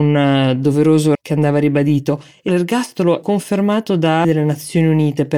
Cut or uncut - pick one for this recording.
cut